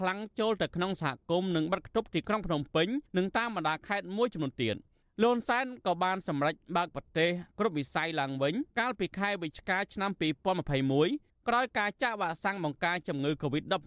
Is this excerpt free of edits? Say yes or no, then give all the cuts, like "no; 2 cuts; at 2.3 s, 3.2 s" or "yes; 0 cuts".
no; 2 cuts; at 3.1 s, 8.7 s